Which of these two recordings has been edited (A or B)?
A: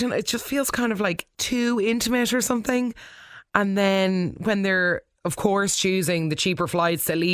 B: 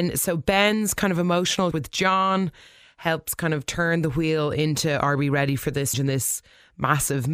B